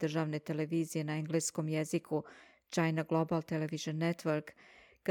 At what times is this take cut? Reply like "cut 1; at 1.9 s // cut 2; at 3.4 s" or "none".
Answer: none